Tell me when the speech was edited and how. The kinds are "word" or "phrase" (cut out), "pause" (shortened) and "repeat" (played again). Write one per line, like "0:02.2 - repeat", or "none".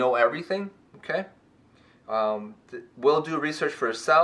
none